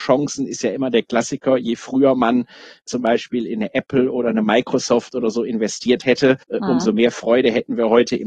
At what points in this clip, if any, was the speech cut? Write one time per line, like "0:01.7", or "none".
0:06.4